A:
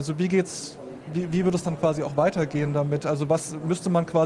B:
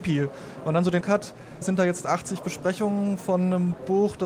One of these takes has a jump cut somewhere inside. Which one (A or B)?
B